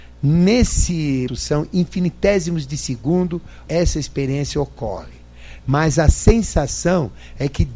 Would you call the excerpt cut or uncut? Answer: cut